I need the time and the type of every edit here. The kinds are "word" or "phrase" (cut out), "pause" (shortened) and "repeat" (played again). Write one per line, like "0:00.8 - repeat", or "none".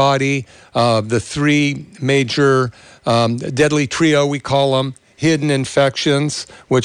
none